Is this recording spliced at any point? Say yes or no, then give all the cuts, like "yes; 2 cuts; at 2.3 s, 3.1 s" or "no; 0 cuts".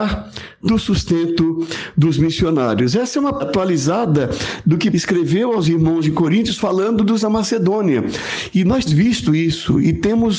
yes; 4 cuts; at 3.4 s, 4.9 s, 7.2 s, 8.9 s